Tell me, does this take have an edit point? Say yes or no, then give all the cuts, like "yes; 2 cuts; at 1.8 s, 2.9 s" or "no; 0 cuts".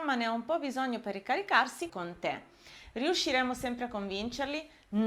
yes; 1 cut; at 1.9 s